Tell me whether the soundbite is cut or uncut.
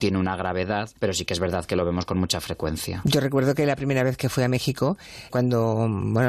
cut